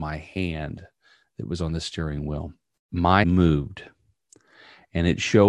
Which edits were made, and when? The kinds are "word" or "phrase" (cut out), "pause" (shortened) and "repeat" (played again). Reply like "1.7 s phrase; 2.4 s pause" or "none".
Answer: 3.2 s word